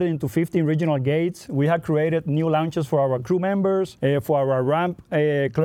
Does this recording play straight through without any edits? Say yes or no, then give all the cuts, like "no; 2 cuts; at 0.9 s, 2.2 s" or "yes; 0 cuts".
no; 1 cut; at 4.0 s